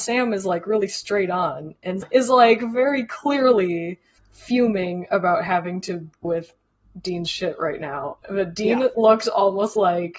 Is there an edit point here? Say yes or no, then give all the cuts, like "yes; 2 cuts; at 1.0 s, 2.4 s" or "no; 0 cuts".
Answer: yes; 3 cuts; at 2.0 s, 4.2 s, 6.2 s